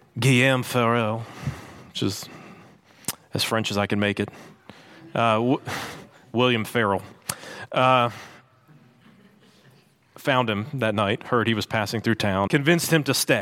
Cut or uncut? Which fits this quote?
cut